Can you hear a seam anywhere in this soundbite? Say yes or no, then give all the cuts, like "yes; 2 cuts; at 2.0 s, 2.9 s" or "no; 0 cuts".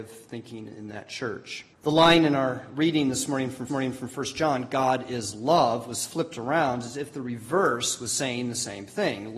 yes; 2 cuts; at 1.7 s, 3.7 s